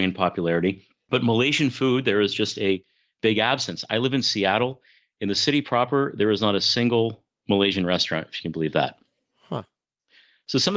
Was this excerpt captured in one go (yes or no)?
yes